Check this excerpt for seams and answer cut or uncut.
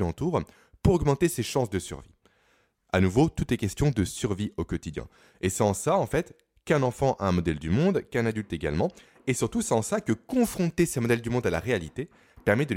uncut